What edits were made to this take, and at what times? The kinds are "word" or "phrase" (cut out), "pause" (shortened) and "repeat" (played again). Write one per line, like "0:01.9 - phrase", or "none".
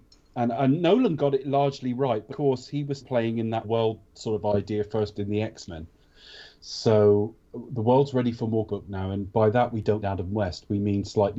0:02.3 - word
0:03.0 - word
0:03.6 - word
0:05.1 - word
0:08.7 - word
0:10.0 - word